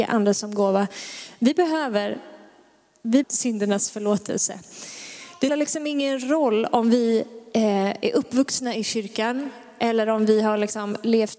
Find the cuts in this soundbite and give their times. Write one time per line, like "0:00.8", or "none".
0:03.2
0:05.5